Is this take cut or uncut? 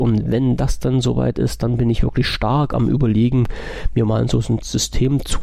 uncut